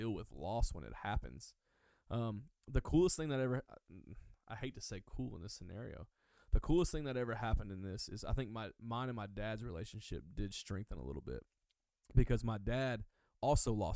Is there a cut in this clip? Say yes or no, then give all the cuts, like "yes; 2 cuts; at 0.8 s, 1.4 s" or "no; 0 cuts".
no; 0 cuts